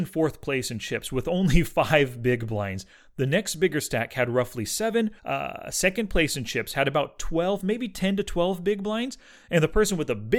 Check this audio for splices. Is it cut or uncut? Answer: cut